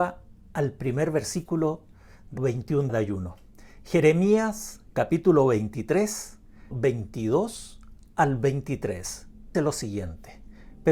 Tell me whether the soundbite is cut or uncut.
cut